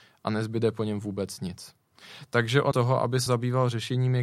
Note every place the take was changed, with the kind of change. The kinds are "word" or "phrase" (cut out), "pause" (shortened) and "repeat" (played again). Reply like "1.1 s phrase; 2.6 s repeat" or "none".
2.7 s word; 3.3 s word